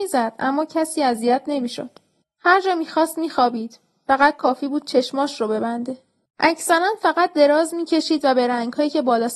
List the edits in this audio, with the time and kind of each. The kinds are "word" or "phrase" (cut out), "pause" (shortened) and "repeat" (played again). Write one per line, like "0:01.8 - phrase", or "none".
none